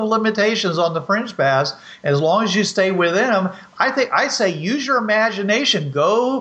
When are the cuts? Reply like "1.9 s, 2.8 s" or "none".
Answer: none